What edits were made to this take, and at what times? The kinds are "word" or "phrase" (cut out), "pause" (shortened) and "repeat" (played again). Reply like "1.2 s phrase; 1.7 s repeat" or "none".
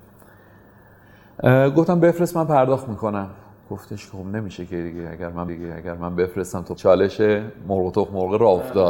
5.5 s repeat; 6.8 s phrase